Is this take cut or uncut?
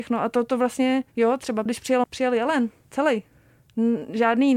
cut